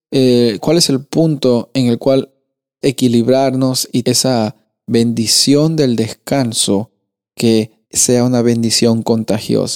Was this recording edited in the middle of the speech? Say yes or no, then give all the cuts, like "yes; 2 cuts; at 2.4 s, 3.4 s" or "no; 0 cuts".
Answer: yes; 3 cuts; at 2.8 s, 4.0 s, 7.8 s